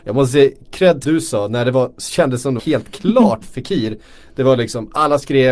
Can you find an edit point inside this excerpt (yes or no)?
yes